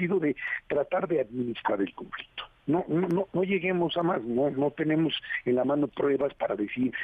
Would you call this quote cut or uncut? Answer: uncut